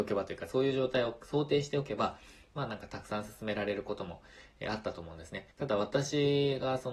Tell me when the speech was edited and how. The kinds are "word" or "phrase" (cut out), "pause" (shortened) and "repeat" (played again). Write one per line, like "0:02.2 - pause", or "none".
0:05.5 - pause